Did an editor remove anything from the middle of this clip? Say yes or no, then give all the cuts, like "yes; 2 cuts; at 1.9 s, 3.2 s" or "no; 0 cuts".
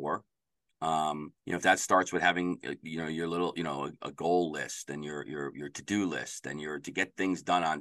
yes; 1 cut; at 1.4 s